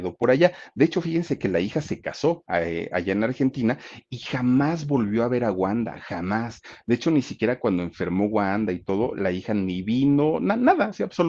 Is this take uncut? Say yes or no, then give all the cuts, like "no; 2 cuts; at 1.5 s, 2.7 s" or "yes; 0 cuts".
yes; 0 cuts